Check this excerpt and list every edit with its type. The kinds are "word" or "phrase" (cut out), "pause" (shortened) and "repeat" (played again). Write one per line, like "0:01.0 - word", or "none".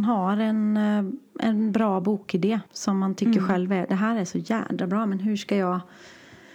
0:02.7 - pause